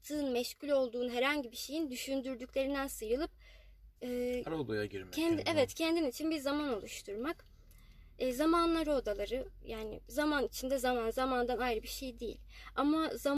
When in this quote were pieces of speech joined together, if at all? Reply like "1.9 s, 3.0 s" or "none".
4.0 s